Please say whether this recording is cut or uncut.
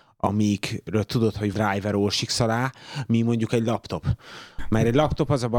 cut